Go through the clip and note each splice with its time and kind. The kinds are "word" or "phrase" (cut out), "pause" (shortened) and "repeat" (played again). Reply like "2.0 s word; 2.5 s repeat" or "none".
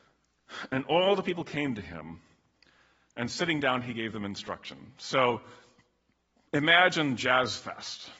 none